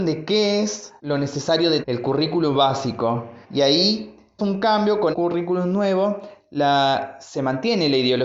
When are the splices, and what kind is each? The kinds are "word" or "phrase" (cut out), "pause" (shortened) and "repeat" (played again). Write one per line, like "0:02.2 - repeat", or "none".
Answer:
0:01.0 - pause
0:01.8 - word
0:03.4 - pause
0:04.4 - word
0:05.1 - word